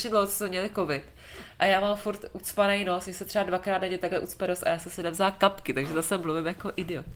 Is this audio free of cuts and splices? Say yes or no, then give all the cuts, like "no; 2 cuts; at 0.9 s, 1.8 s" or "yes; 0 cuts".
yes; 0 cuts